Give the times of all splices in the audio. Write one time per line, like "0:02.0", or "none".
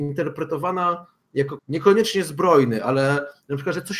0:01.6